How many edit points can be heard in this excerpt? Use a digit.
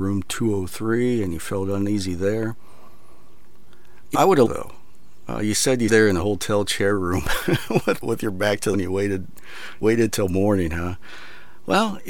6